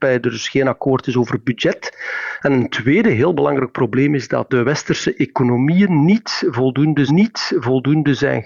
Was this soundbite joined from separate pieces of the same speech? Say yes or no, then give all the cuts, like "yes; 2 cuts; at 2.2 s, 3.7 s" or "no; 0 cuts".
yes; 2 cuts; at 4.5 s, 7.1 s